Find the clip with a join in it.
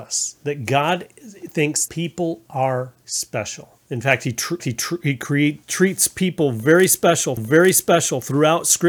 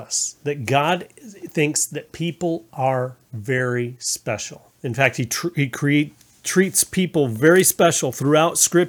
first; 5 cuts; at 1.9 s, 3.0 s, 4.6 s, 5.6 s, 7.4 s

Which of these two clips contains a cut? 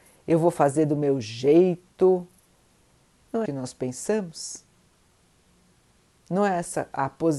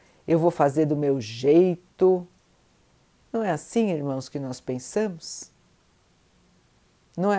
first; 1 cut; at 3.5 s

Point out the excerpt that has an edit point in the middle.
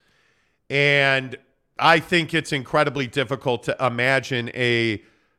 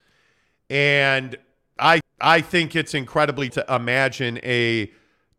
second; 2 cuts; at 2.0 s, 3.5 s

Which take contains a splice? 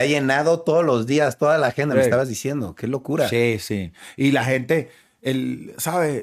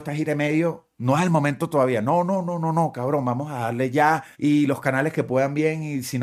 second; 1 cut; at 4.3 s

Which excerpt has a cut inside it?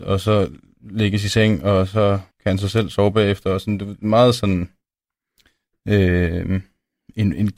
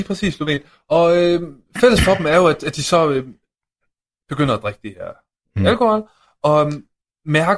first; 1 cut; at 2.3 s

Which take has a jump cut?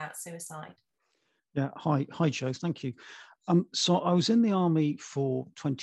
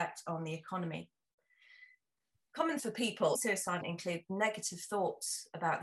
second; 3 cuts; at 2.8 s, 3.3 s, 3.8 s

